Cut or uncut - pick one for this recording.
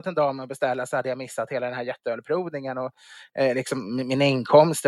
uncut